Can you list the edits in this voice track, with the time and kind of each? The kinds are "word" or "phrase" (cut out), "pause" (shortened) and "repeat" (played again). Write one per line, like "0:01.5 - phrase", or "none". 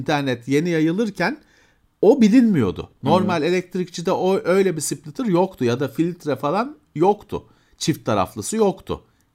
none